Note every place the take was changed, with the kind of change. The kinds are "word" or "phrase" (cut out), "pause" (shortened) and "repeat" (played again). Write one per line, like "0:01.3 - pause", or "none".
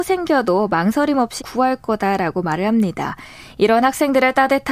0:01.4 - word